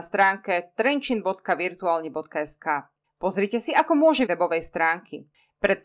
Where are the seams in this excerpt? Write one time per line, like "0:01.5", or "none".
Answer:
0:03.0
0:04.3